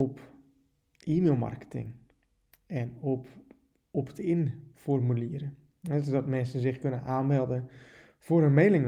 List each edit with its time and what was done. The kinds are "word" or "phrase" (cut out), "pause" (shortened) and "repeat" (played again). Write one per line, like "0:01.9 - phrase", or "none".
none